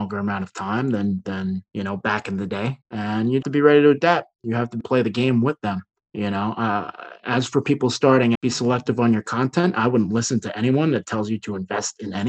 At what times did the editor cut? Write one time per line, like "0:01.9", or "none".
0:01.7
0:02.8
0:03.4
0:04.8
0:06.0
0:08.3